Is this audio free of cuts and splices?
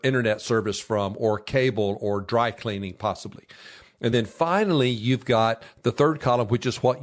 yes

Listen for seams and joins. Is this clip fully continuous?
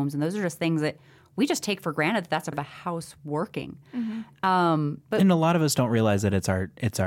no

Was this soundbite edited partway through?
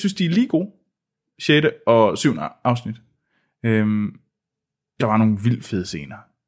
yes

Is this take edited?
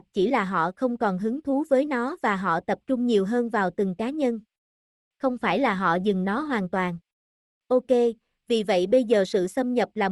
no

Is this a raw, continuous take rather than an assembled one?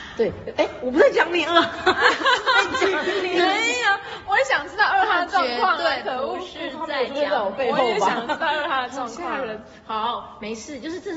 yes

